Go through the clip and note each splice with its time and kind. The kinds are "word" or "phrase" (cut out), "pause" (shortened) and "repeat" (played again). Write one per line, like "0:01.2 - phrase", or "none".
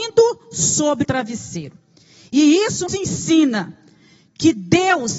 0:01.0 - word
0:02.9 - word